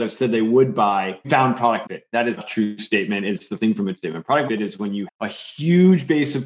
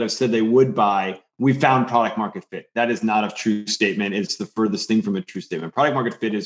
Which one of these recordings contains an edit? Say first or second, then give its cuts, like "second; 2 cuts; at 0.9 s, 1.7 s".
first; 7 cuts; at 1.2 s, 1.8 s, 2.4 s, 3.6 s, 4.0 s, 4.5 s, 5.1 s